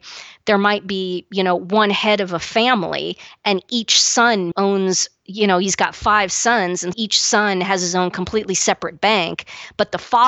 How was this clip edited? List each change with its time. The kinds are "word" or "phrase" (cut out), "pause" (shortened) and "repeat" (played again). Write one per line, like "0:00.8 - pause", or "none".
0:04.5 - word
0:06.9 - word